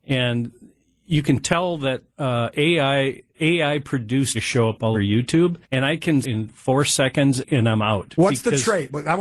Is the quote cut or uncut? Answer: cut